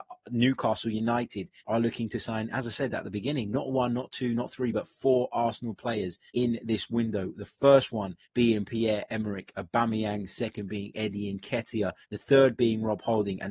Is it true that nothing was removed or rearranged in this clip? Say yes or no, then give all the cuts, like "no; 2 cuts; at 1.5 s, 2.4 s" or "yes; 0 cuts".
no; 4 cuts; at 1.6 s, 6.3 s, 8.2 s, 12.0 s